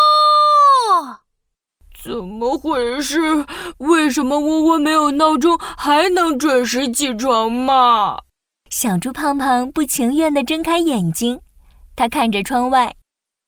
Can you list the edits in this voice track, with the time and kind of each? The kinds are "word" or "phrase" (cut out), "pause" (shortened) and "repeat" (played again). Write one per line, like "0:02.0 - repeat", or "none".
none